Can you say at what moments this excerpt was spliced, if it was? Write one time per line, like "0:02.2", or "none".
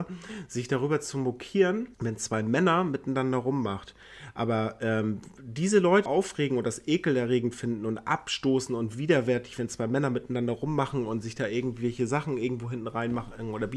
0:01.9
0:06.1